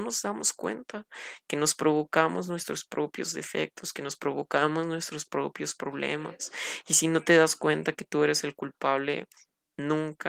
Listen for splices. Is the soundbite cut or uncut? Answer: uncut